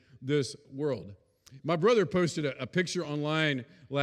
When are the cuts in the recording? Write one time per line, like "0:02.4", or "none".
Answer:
none